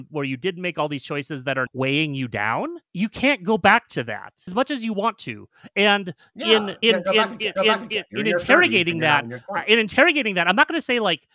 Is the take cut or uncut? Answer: cut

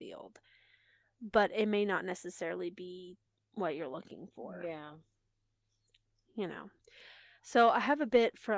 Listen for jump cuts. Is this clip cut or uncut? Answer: uncut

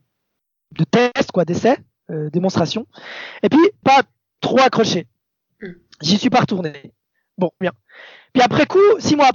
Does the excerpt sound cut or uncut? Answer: cut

